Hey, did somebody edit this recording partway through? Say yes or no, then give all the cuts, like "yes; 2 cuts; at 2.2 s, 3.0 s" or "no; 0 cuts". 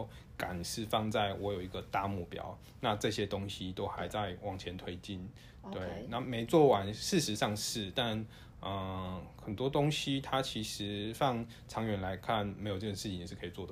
no; 0 cuts